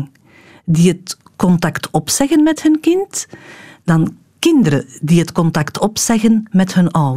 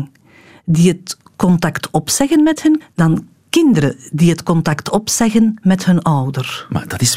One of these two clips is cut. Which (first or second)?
second